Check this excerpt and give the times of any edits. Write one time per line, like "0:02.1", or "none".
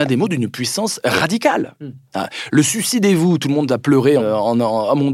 0:04.2